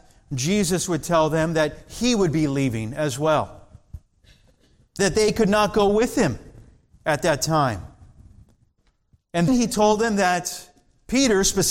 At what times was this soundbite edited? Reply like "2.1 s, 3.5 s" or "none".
5.0 s, 6.9 s, 9.5 s

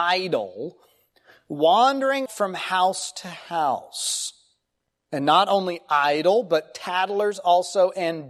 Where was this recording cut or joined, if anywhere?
2.3 s

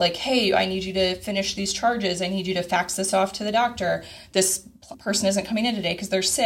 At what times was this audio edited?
none

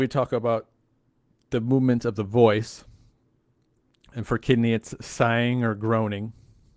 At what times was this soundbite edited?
none

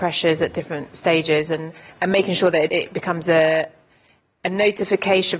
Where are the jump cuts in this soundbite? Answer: none

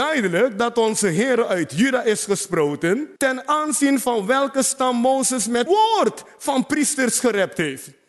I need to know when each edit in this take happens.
3.2 s, 5.7 s

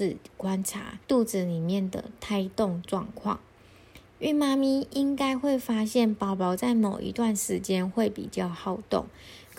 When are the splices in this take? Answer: 1.0 s

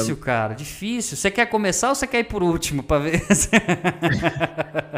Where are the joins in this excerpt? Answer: none

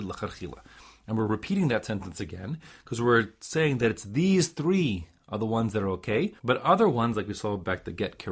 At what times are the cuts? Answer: 6.4 s

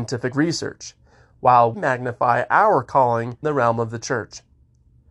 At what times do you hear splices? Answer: 1.7 s, 3.4 s

